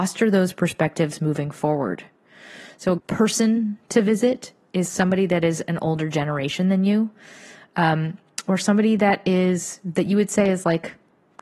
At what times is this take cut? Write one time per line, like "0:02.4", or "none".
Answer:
0:03.0